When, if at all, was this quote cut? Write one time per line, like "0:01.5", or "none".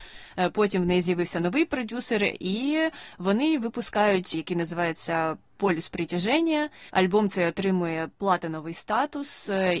0:04.3
0:06.9
0:08.1